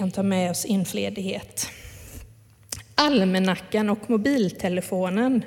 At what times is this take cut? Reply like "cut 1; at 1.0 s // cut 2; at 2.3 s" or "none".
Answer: cut 1; at 0.9 s